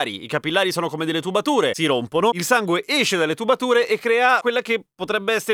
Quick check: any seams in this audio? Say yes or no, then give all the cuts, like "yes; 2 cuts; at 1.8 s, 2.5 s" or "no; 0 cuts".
no; 0 cuts